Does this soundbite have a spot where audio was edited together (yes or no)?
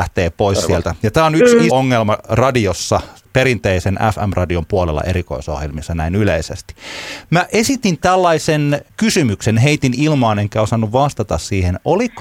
yes